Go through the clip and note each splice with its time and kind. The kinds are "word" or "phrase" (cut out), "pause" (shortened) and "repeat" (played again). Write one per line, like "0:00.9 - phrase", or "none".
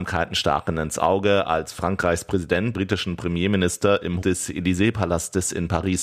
0:02.7 - word
0:04.2 - word

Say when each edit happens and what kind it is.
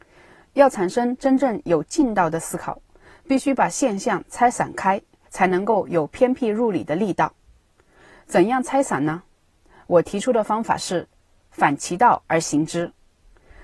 0:05.2 - phrase

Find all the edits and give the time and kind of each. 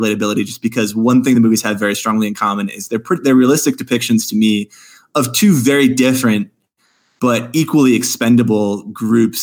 none

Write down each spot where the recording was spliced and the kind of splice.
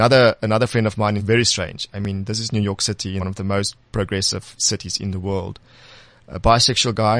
0:01.2 - phrase
0:03.2 - phrase

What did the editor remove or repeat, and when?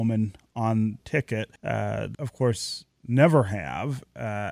0:01.0 - word
0:01.6 - pause
0:02.1 - word

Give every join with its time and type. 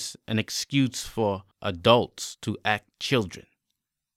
0:01.5 - pause
0:02.9 - word

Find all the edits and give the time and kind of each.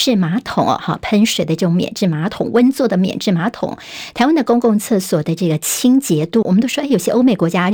0:06.4 - word

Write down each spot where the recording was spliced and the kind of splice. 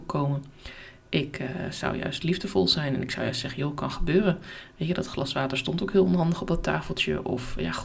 none

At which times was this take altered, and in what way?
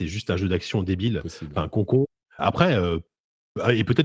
0:02.4 - word

